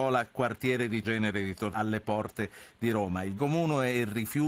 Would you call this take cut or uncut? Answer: cut